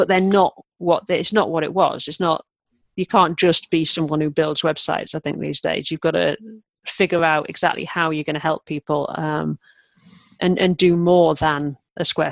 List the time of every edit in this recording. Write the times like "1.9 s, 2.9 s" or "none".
none